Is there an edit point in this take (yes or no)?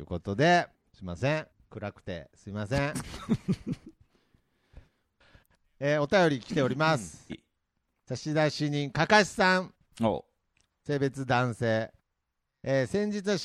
yes